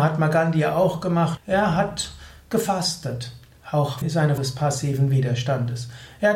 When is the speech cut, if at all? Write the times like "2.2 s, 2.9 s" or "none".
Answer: 1.4 s, 4.0 s, 4.4 s

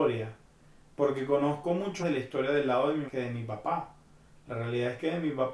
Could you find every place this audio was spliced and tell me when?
2.0 s, 3.1 s

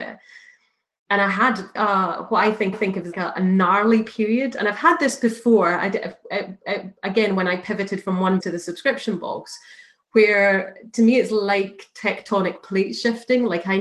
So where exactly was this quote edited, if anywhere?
1.8 s, 2.7 s, 3.1 s, 6.6 s, 8.4 s

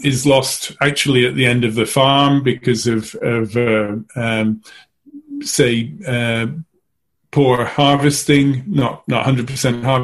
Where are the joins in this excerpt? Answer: none

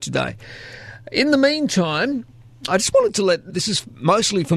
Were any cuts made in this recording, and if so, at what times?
2.7 s, 3.5 s

